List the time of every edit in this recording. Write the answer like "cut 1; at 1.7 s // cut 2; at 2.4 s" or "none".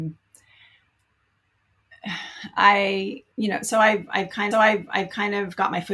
cut 1; at 3.3 s // cut 2; at 4.5 s